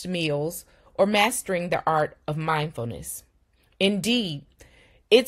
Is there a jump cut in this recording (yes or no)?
no